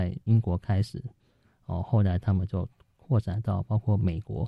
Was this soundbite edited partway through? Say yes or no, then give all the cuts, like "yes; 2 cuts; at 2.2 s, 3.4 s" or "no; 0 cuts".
no; 0 cuts